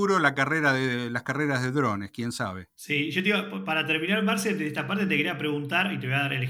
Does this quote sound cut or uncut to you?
uncut